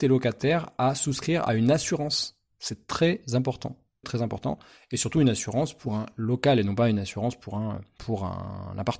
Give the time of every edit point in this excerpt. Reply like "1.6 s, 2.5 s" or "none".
4.0 s